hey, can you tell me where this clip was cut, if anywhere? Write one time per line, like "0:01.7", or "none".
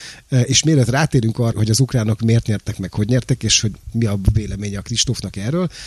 0:01.5